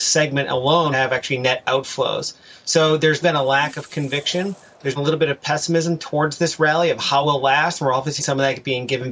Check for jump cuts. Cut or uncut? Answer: cut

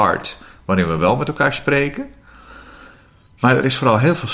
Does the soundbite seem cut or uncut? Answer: uncut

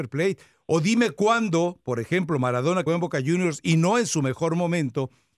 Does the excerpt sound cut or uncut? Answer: cut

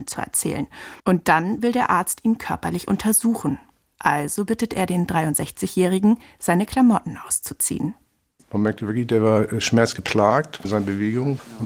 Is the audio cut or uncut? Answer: cut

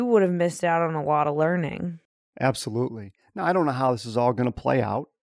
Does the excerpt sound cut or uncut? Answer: uncut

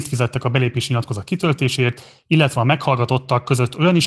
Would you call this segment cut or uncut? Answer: uncut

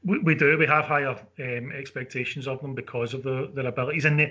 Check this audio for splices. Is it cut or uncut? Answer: uncut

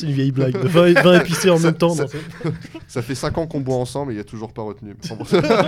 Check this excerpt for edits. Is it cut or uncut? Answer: uncut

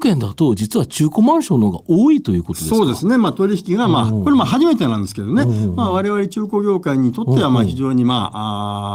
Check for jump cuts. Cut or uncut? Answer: uncut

